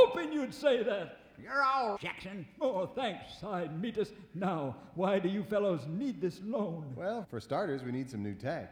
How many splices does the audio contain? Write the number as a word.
two